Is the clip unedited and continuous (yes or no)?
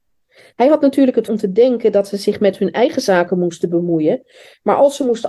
no